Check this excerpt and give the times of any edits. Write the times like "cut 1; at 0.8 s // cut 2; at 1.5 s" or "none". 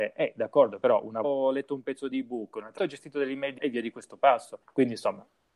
cut 1; at 1.2 s // cut 2; at 2.8 s // cut 3; at 3.6 s // cut 4; at 4.6 s